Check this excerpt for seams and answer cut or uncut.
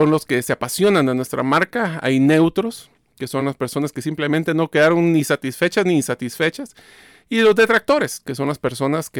uncut